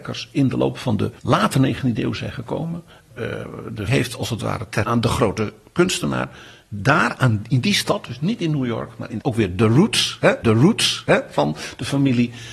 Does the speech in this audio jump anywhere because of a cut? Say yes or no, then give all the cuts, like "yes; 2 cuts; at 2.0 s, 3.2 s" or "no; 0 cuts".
yes; 6 cuts; at 1.2 s, 2.9 s, 3.9 s, 4.8 s, 9.2 s, 10.4 s